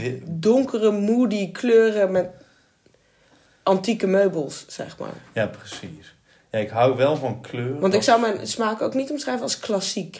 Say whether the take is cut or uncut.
uncut